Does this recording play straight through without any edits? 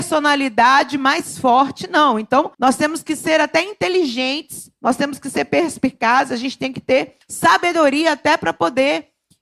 no; 2 cuts; at 2.5 s, 7.2 s

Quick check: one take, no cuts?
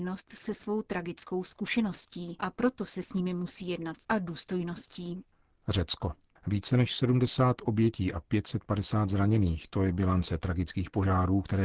no; 1 cut; at 4.0 s

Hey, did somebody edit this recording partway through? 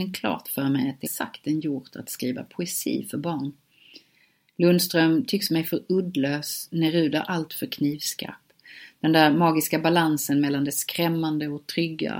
yes; 1 cut; at 1.1 s

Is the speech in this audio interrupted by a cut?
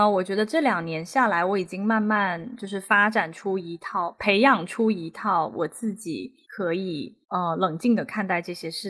yes; 2 cuts; at 6.4 s, 7.2 s

